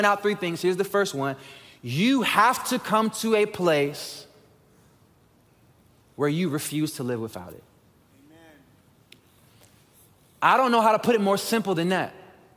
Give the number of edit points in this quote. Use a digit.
0